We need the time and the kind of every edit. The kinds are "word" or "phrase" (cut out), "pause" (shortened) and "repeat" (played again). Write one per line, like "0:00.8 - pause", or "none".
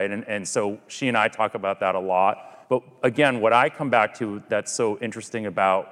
0:02.6 - pause

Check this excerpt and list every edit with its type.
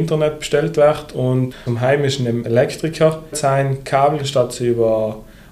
0:03.3 - word
0:04.2 - word

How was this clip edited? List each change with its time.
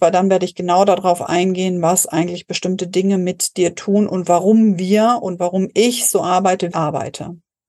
0:06.7 - phrase

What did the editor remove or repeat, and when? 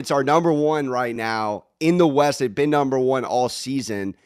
none

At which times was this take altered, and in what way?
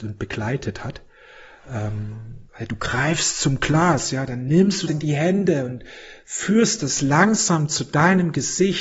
0:02.5 - pause
0:04.9 - phrase

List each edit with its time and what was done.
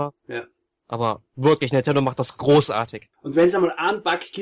0:01.3 - pause
0:03.1 - pause

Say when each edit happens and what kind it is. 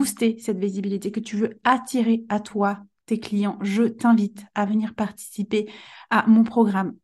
none

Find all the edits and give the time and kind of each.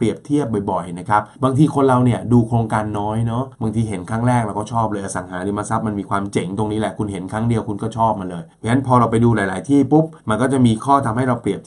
0:01.3 - pause
0:03.5 - pause
0:08.5 - pause
0:10.2 - pause

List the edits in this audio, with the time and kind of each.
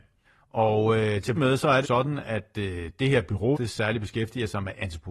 0:01.4 - word
0:01.8 - phrase
0:03.5 - word

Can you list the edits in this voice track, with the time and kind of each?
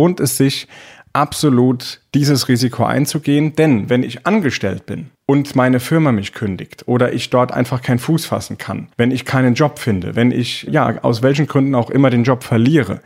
0:05.1 - pause
0:08.9 - pause

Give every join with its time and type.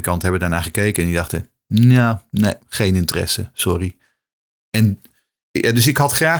none

